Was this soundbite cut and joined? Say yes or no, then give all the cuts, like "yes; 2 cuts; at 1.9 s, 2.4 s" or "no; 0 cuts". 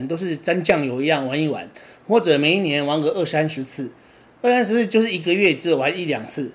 no; 0 cuts